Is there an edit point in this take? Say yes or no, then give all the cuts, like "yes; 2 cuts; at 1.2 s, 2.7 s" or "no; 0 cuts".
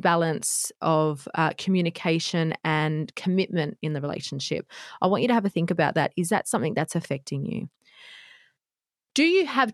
no; 0 cuts